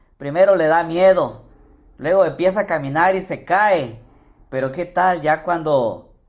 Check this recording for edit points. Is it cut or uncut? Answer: uncut